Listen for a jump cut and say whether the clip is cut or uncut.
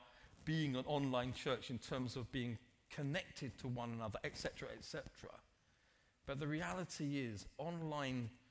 uncut